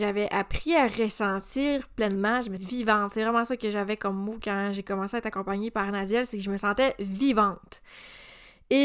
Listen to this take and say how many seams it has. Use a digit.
1